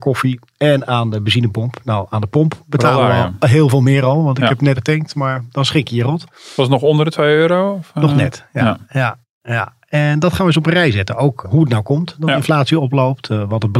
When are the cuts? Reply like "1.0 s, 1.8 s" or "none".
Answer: 4.8 s, 11.4 s